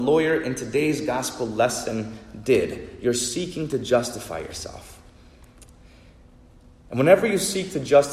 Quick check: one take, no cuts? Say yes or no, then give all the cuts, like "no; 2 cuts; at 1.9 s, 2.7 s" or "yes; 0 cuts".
yes; 0 cuts